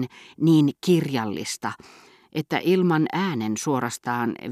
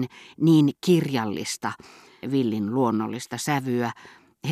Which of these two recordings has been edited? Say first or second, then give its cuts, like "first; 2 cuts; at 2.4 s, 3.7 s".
second; 1 cut; at 2.2 s